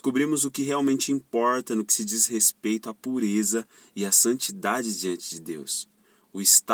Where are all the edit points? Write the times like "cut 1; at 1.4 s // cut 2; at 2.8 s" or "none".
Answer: none